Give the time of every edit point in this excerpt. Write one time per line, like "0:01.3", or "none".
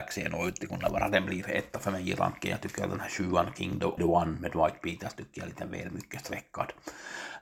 0:04.0